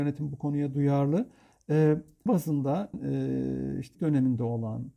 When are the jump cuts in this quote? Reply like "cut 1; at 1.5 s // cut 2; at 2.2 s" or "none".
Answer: cut 1; at 2.3 s // cut 2; at 2.9 s // cut 3; at 3.9 s